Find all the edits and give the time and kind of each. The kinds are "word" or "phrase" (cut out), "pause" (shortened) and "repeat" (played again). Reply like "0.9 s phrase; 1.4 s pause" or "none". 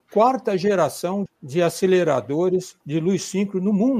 1.3 s word; 2.8 s pause